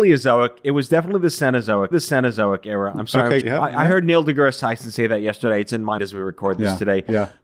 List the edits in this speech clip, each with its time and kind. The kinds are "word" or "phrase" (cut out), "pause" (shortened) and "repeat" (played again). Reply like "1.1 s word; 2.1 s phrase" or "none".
1.9 s repeat; 3.4 s phrase; 6.0 s word